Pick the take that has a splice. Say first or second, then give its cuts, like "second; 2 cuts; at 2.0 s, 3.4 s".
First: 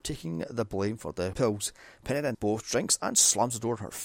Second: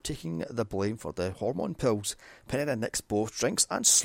first; 2 cuts; at 1.3 s, 2.3 s